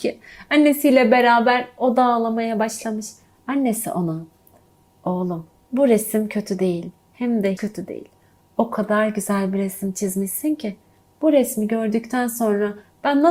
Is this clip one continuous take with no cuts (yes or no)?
no